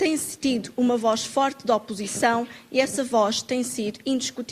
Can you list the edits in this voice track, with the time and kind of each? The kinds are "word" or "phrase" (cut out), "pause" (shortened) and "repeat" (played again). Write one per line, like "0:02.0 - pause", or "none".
none